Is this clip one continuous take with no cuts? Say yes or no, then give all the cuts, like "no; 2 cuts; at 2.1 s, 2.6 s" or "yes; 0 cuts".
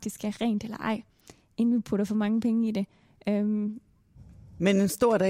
yes; 0 cuts